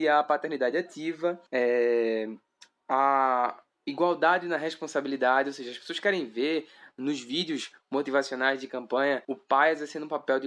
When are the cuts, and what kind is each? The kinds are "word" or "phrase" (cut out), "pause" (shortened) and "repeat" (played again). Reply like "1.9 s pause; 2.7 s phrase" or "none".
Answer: 1.5 s pause; 9.2 s pause